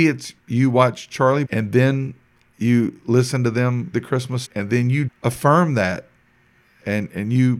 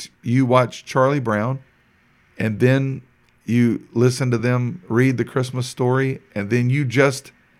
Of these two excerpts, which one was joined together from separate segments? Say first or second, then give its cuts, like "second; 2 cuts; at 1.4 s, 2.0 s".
first; 4 cuts; at 1.4 s, 3.9 s, 4.4 s, 5.1 s